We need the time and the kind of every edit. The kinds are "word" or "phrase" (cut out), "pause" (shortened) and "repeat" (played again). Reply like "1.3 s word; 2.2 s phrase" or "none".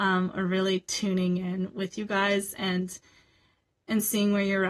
none